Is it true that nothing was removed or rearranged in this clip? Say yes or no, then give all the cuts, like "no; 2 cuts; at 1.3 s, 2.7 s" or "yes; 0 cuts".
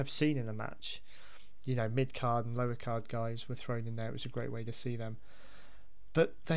yes; 0 cuts